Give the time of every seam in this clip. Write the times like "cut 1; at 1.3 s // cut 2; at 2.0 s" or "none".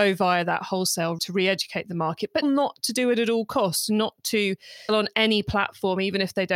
cut 1; at 1.2 s // cut 2; at 2.4 s // cut 3; at 4.9 s